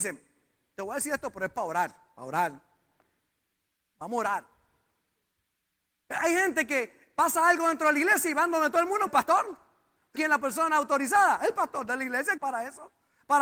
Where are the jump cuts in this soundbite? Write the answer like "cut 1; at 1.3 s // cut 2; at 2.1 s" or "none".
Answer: cut 1; at 9.1 s // cut 2; at 10.2 s // cut 3; at 12.4 s